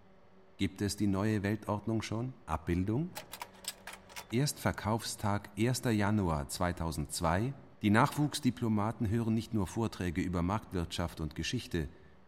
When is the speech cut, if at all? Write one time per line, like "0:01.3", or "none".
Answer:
0:02.4
0:07.7